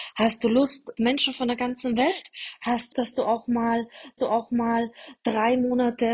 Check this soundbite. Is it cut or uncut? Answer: cut